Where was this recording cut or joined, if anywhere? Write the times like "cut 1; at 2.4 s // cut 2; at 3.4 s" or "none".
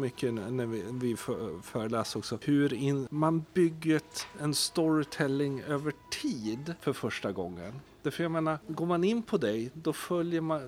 none